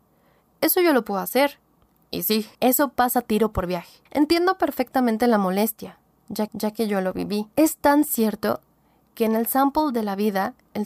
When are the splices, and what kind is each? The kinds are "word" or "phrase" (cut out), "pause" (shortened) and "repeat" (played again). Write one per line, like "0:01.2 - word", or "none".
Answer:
0:02.5 - pause
0:04.1 - pause
0:06.5 - repeat
0:07.5 - pause